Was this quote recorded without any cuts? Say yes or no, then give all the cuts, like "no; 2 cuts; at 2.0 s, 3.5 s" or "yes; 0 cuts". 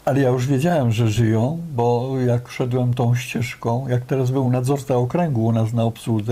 yes; 0 cuts